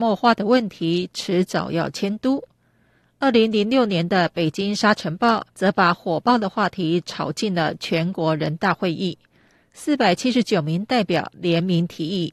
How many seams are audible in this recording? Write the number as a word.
one